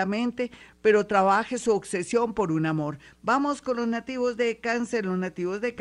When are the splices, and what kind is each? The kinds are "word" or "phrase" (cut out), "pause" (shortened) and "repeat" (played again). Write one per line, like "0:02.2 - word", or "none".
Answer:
none

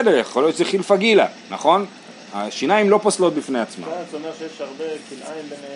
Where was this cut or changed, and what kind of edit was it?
none

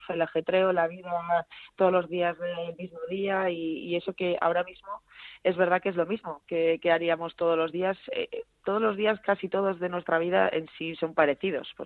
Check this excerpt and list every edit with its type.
0:06.4 - pause

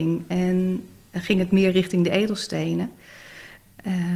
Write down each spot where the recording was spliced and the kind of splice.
none

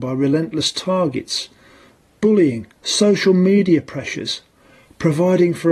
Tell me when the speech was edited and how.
0:02.8 - pause

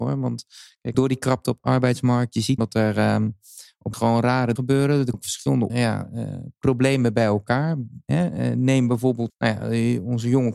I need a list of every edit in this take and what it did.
0:00.9 - word
0:01.6 - word
0:02.6 - word
0:03.9 - word
0:04.6 - word
0:05.1 - word
0:05.7 - word
0:09.3 - word

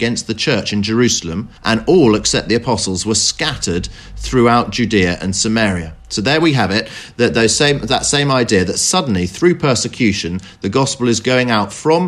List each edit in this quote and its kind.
0:01.6 - pause
0:06.0 - pause

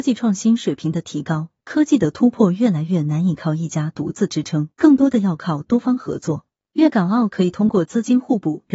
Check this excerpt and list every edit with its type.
0:04.7 - pause

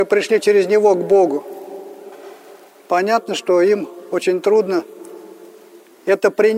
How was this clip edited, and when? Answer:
none

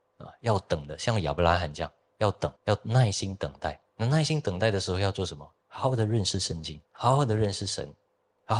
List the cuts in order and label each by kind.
0:02.6 - pause
0:03.9 - pause
0:05.6 - pause
0:06.9 - pause

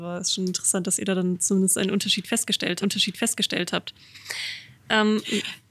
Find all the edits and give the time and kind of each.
0:02.8 - repeat

